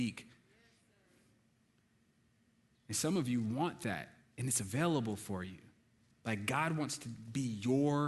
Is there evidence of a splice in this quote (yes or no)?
no